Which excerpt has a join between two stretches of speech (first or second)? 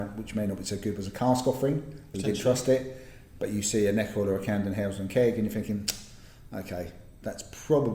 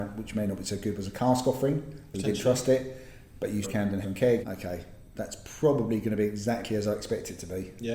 second